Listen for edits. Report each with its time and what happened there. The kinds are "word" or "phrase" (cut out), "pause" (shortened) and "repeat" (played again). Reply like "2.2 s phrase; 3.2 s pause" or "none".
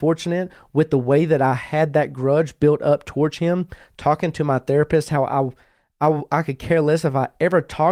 none